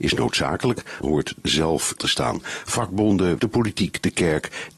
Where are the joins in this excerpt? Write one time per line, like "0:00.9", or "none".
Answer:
0:01.0
0:01.4
0:02.0
0:03.4